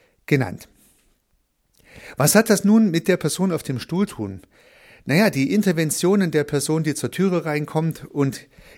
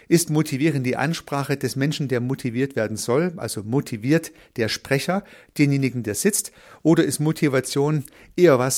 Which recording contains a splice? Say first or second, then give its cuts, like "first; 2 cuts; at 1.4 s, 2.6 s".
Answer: first; 1 cut; at 4.1 s